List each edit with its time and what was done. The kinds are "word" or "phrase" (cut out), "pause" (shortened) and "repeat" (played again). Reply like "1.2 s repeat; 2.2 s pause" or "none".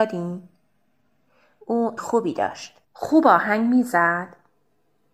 2.0 s phrase; 2.8 s pause